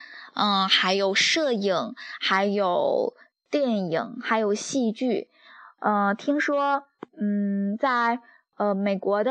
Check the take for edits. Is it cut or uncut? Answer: uncut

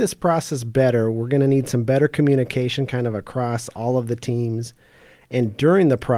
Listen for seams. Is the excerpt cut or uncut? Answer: uncut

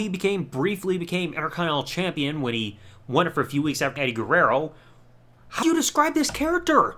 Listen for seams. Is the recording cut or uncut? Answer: cut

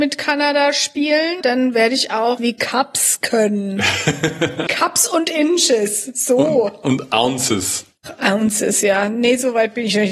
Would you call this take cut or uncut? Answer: cut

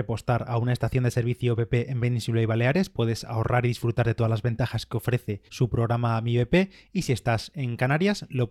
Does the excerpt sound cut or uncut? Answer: cut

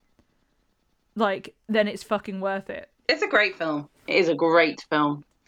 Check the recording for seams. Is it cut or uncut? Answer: cut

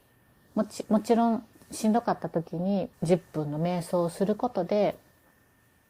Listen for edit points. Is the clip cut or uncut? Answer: cut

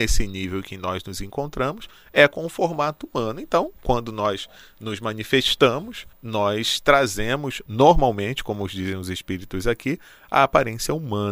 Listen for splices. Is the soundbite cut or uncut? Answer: cut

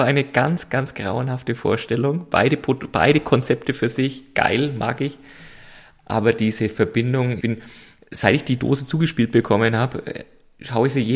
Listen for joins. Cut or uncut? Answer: cut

